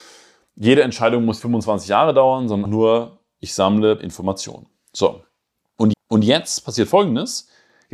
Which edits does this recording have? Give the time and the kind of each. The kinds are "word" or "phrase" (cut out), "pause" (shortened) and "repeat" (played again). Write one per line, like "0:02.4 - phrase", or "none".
0:01.4 - word
0:02.7 - word
0:04.0 - word
0:05.9 - repeat